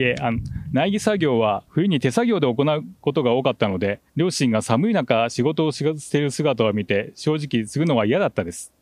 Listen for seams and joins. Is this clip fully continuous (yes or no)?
no